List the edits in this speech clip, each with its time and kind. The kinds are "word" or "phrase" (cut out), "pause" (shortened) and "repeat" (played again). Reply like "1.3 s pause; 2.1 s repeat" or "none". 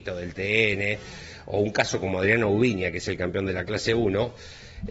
none